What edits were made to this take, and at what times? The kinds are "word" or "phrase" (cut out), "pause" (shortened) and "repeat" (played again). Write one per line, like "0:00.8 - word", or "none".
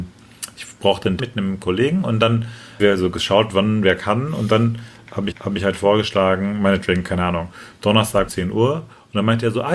0:01.2 - word
0:02.8 - word
0:05.3 - repeat
0:08.3 - word